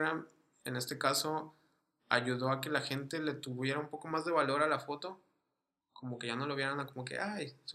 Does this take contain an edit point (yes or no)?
no